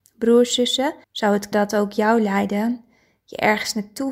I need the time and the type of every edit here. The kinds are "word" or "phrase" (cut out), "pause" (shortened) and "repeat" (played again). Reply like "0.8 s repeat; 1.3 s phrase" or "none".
1.0 s pause; 1.5 s word